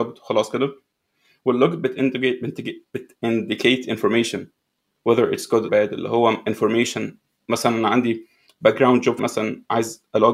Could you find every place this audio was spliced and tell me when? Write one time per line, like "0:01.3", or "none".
0:05.7
0:09.2